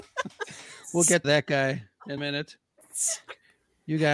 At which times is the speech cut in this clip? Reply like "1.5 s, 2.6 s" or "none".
1.2 s, 2.2 s